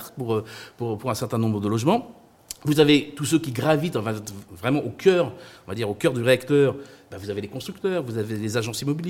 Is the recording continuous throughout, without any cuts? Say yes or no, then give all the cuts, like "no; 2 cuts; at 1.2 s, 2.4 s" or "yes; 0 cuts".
yes; 0 cuts